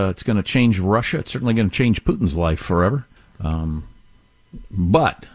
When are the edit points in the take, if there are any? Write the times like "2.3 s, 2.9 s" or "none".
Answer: 3.2 s